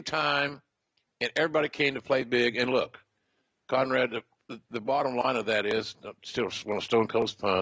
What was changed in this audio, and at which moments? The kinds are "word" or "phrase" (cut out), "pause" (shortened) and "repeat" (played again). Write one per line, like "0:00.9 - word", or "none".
none